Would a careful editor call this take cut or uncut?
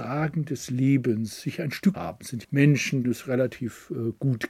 cut